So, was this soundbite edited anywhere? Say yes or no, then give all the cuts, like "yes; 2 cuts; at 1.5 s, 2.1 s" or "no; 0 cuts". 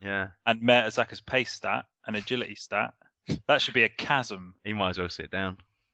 no; 0 cuts